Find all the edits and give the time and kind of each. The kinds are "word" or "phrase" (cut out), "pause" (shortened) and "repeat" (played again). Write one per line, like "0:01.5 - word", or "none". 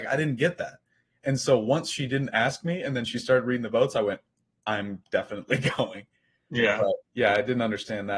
0:07.0 - pause